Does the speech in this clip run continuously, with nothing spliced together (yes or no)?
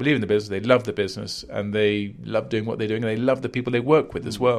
yes